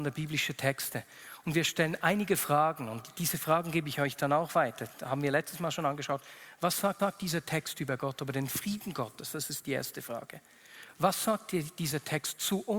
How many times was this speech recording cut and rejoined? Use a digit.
1